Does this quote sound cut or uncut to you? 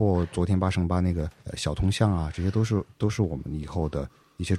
cut